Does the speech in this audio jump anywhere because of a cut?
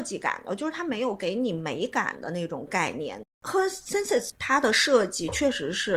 no; 0 cuts

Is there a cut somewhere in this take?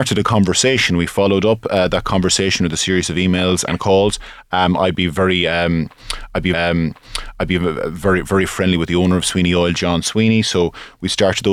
yes; 2 cuts; at 3.7 s, 6.5 s

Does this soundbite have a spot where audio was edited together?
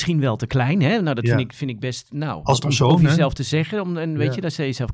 no; 0 cuts

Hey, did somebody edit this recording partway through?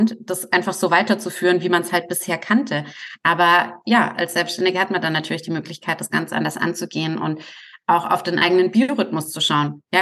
no; 0 cuts

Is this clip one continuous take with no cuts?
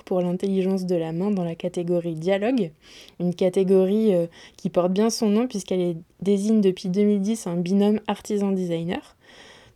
yes; 0 cuts

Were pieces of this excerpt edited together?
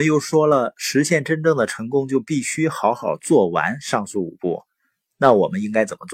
no; 0 cuts

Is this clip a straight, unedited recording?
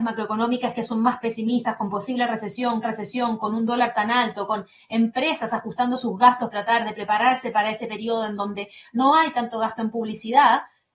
no; 2 cuts; at 2.8 s, 6.5 s

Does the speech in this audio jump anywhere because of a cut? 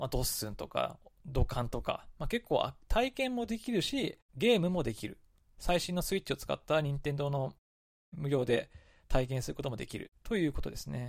no; 0 cuts

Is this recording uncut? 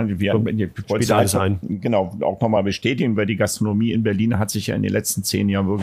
yes; 0 cuts

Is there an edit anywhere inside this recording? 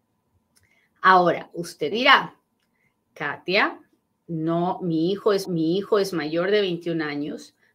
yes; 2 cuts; at 1.9 s, 5.4 s

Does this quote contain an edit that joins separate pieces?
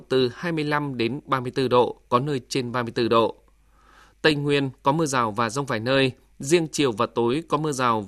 no; 0 cuts

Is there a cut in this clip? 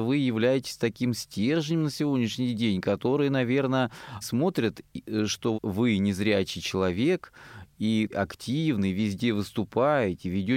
yes; 3 cuts; at 4.2 s, 5.5 s, 8.1 s

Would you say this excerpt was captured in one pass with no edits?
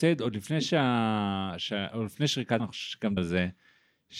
no; 2 cuts; at 2.6 s, 3.2 s

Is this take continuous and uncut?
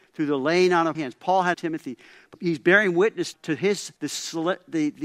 no; 5 cuts; at 0.9 s, 1.5 s, 2.3 s, 3.3 s, 4.0 s

